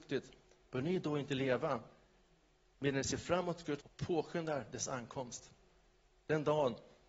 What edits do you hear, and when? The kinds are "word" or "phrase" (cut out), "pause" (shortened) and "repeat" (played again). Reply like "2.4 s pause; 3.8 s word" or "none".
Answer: 3.8 s word